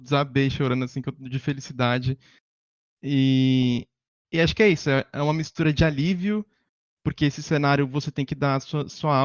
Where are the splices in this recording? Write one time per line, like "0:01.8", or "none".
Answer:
none